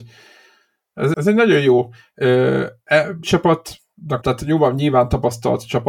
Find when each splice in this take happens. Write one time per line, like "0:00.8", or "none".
0:01.1
0:03.2
0:04.2